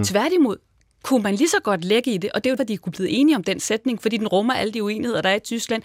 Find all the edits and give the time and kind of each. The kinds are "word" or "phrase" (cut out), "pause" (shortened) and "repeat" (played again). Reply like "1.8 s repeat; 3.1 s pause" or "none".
2.6 s word